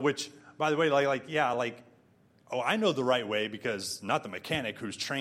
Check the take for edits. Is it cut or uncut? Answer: uncut